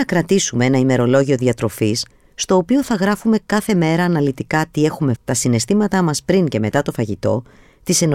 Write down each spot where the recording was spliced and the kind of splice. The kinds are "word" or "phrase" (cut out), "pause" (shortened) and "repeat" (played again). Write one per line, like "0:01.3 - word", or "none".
0:02.1 - pause
0:05.2 - word